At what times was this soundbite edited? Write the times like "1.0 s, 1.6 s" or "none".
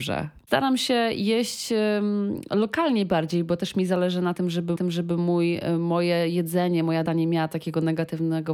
4.8 s, 7.1 s